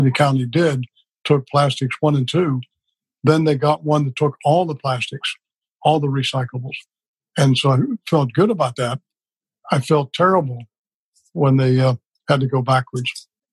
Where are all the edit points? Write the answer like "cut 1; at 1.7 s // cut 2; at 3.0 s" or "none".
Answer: none